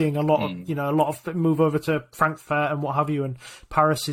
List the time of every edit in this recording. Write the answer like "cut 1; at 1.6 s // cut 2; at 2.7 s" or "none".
none